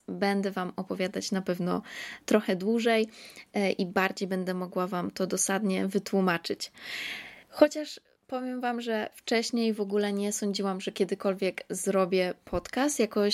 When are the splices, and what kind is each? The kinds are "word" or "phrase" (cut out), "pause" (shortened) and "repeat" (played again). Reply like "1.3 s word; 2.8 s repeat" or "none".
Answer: 2.2 s pause; 7.4 s pause